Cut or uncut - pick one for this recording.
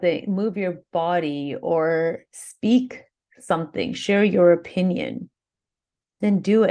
uncut